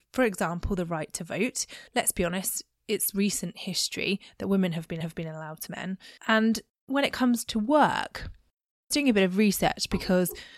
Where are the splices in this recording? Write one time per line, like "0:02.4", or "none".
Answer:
0:01.9
0:05.0
0:05.7
0:06.2
0:08.9